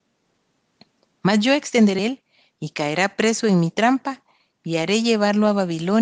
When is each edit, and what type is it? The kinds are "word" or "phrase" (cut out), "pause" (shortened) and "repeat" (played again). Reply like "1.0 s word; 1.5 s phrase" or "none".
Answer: 2.0 s phrase